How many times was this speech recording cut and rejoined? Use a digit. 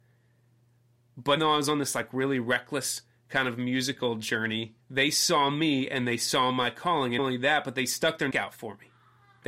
4